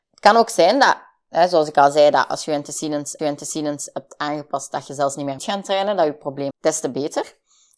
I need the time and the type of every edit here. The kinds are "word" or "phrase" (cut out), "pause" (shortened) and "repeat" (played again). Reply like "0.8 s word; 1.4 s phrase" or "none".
3.2 s repeat; 5.4 s word; 6.5 s phrase